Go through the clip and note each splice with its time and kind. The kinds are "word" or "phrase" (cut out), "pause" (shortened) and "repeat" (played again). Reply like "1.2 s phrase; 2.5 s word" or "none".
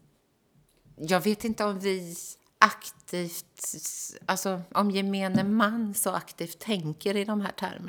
2.4 s pause